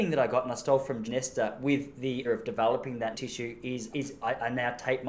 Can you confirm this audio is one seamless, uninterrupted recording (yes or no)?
no